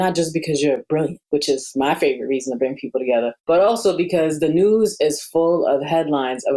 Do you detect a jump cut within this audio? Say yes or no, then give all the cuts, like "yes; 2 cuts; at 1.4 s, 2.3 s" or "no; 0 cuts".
yes; 2 cuts; at 1.2 s, 3.4 s